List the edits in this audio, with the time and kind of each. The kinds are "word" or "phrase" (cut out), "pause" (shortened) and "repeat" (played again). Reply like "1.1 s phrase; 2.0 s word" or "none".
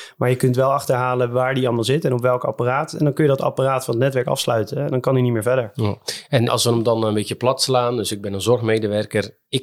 6.5 s word